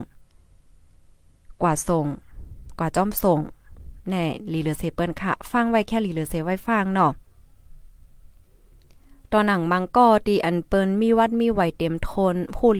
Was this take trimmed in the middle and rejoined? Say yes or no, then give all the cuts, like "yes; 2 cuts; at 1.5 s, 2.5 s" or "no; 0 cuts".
no; 0 cuts